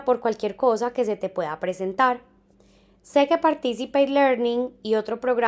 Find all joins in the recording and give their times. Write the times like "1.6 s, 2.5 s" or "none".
none